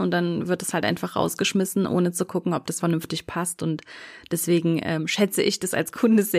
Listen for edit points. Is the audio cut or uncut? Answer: cut